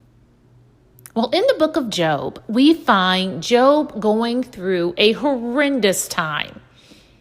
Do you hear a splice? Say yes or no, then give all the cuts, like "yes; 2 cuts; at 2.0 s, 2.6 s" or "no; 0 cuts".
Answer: no; 0 cuts